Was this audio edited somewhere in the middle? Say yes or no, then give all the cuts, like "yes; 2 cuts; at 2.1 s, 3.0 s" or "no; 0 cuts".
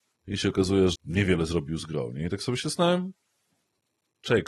yes; 1 cut; at 0.9 s